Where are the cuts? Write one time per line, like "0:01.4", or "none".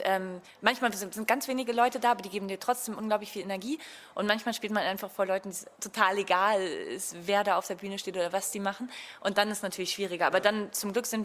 0:05.7